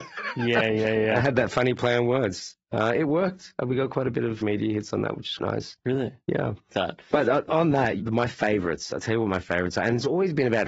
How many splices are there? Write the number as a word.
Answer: five